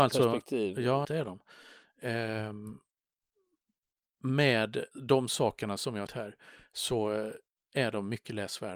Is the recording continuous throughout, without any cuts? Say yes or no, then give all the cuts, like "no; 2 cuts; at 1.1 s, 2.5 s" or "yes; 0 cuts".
no; 3 cuts; at 1.0 s, 4.9 s, 6.1 s